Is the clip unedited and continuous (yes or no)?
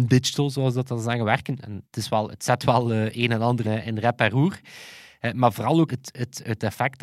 no